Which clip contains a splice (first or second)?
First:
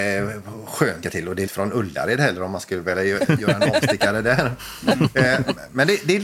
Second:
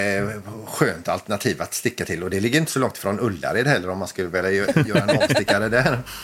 first